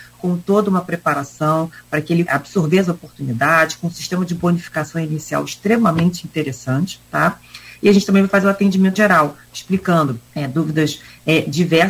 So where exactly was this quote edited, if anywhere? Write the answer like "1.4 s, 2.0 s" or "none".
2.3 s, 7.0 s, 9.0 s, 10.3 s